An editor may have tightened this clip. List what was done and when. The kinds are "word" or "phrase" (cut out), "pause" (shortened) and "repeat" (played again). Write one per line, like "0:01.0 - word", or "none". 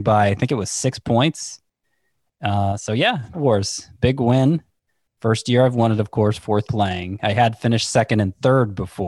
0:03.3 - word
0:06.6 - word